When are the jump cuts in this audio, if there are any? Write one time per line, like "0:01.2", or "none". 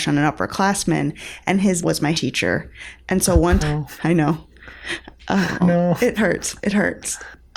0:01.8
0:02.1
0:03.6
0:05.6
0:06.2

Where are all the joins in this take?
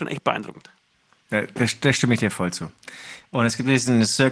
none

